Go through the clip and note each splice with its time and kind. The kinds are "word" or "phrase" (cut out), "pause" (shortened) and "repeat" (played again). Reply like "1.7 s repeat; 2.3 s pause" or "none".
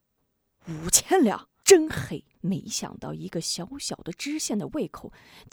1.6 s word; 2.3 s pause